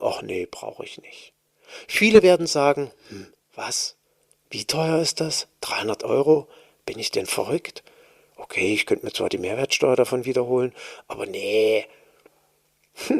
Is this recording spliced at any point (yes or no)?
no